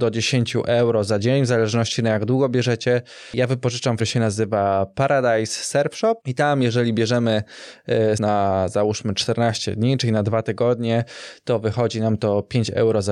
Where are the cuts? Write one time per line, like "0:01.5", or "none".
0:04.0
0:06.2
0:08.2

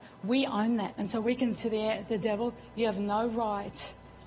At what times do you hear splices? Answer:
0:00.9
0:01.6

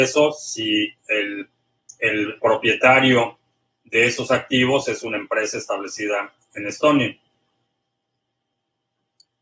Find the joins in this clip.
0:02.4

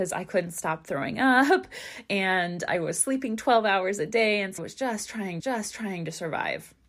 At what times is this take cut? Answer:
0:04.6
0:05.4

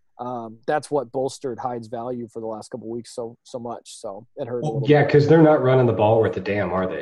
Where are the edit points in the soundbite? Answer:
none

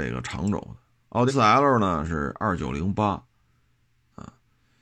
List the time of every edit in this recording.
0:01.3

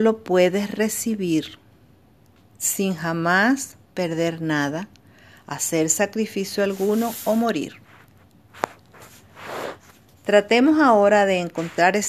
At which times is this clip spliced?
none

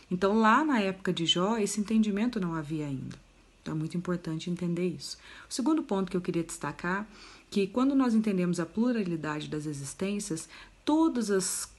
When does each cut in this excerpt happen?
none

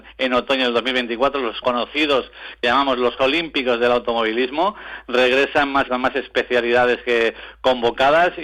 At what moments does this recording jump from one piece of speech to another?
0:01.6
0:02.6
0:03.2
0:05.9

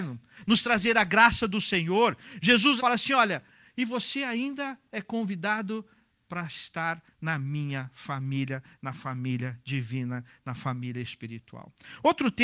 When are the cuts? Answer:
0:02.8

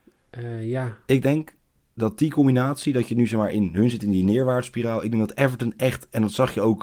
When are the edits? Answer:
none

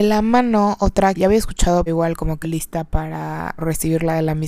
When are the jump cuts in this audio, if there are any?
0:01.2
0:01.9
0:02.4
0:03.6

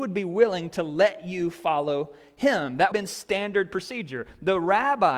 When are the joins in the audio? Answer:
0:02.9

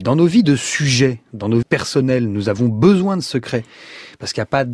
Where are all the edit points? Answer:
0:01.6

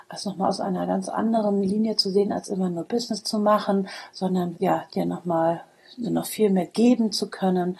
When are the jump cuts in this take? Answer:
0:04.5
0:06.0

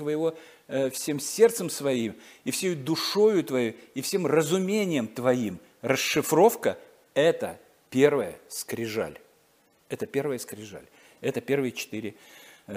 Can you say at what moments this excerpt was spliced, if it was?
none

